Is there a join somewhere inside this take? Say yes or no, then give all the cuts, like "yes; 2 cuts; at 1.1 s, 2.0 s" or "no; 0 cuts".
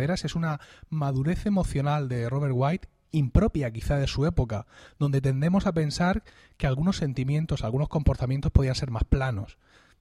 no; 0 cuts